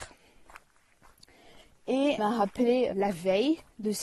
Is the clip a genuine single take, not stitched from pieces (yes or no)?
no